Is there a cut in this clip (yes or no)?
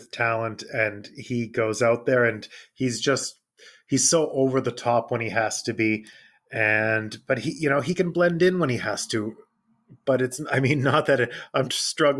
no